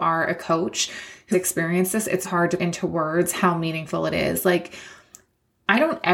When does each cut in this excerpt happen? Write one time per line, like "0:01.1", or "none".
0:01.3
0:02.2
0:02.6

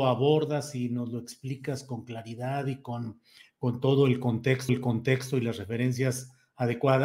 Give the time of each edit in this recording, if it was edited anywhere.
0:04.7

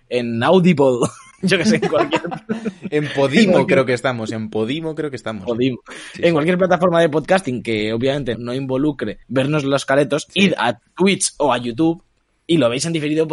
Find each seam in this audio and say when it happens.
0:08.3
0:09.2

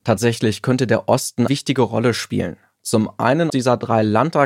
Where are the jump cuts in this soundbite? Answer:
0:01.5
0:03.5

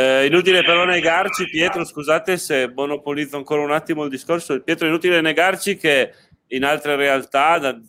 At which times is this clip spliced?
none

